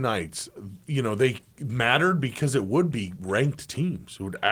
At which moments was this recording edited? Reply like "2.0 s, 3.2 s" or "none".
none